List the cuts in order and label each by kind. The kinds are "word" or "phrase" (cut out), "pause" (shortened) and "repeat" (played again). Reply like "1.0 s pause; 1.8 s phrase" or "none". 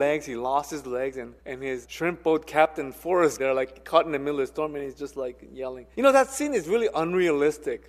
1.4 s pause; 1.8 s word; 3.4 s phrase; 5.9 s pause